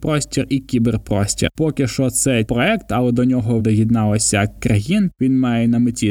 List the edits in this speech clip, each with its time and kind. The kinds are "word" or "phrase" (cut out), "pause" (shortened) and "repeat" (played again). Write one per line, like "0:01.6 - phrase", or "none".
0:02.5 - word
0:03.6 - word
0:04.6 - word